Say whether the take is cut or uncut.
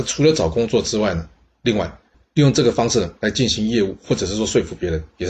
uncut